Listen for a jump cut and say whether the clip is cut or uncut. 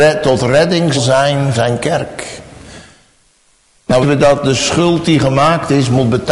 cut